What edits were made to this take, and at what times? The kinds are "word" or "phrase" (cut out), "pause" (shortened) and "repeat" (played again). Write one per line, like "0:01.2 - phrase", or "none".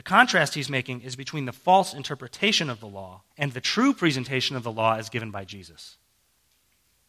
0:03.3 - pause